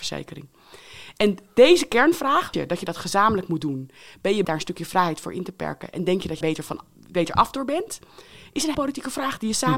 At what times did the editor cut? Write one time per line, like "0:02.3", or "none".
0:02.5
0:04.4
0:06.4
0:08.7